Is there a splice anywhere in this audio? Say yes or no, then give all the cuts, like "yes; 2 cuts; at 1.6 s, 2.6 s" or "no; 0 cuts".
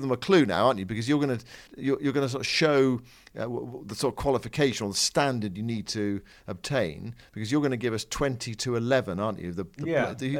yes; 1 cut; at 1.7 s